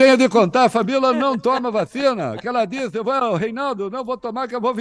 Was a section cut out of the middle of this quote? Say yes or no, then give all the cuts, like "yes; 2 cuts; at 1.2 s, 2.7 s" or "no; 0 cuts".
no; 0 cuts